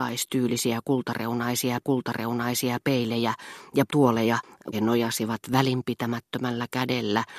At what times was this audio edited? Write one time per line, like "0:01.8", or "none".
0:01.8
0:03.9
0:04.7